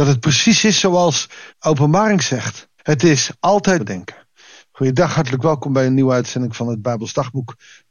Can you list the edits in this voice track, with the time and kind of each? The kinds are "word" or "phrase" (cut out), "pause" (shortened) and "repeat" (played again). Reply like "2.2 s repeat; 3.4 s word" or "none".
1.5 s pause; 2.8 s pause; 3.8 s phrase